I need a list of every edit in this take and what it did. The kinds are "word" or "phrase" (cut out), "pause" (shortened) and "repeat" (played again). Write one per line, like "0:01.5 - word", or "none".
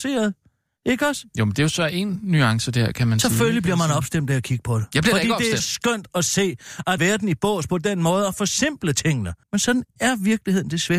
0:05.6 - word
0:07.0 - phrase
0:09.4 - pause